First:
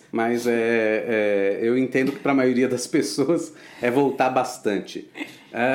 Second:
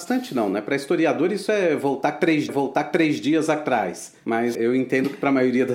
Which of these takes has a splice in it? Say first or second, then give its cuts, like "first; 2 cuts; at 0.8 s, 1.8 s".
second; 2 cuts; at 2.5 s, 4.5 s